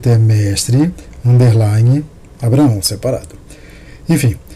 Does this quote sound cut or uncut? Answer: uncut